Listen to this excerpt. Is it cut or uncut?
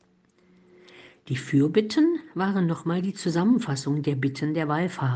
uncut